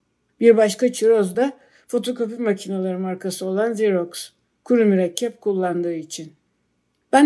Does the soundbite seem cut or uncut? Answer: uncut